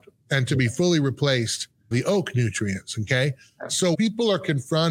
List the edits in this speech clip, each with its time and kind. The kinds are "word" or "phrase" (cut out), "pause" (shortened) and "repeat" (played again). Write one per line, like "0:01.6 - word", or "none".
0:01.9 - word
0:03.9 - word

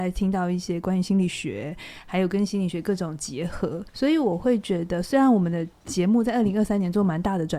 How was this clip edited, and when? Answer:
0:03.9 - pause

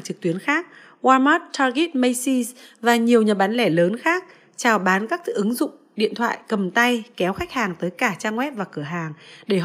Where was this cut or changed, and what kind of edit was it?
none

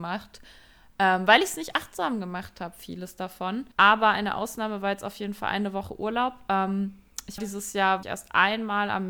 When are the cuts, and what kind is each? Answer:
0:03.7 - pause
0:07.4 - word
0:08.0 - word

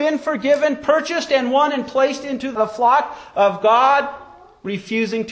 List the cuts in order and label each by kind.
none

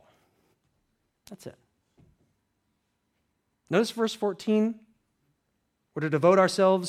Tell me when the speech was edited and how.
none

